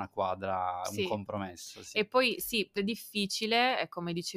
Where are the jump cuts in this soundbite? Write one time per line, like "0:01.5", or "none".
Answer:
0:02.8